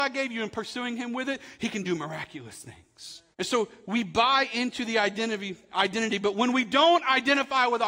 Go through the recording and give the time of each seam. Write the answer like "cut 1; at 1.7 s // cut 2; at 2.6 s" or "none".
cut 1; at 3.3 s